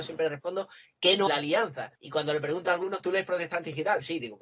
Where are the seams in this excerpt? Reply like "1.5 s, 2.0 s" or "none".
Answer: 1.3 s, 2.0 s

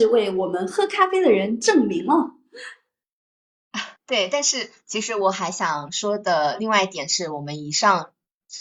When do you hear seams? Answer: 4.0 s

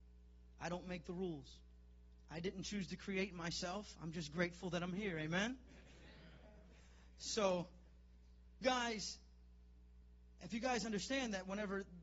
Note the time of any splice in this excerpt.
8.6 s

